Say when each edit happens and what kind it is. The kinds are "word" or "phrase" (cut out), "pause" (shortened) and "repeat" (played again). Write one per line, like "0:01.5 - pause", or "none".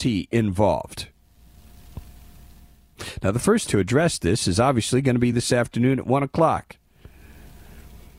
0:03.7 - word